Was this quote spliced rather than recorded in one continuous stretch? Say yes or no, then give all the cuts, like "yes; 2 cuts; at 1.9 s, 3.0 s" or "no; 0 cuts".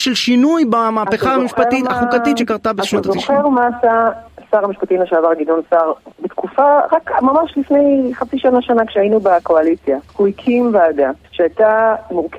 yes; 3 cuts; at 6.1 s, 10.1 s, 11.2 s